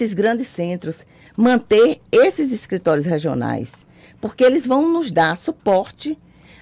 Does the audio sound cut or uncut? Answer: uncut